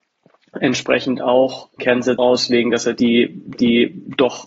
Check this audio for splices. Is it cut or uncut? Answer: cut